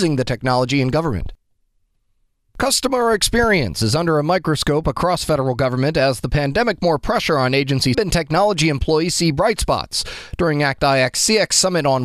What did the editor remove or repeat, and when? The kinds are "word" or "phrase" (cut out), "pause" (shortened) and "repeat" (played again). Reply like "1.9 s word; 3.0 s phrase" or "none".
6.8 s word; 7.9 s phrase